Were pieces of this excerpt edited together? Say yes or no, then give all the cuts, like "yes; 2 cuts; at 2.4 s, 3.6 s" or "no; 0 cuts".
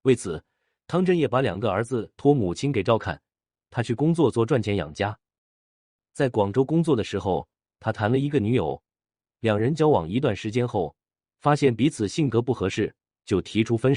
no; 0 cuts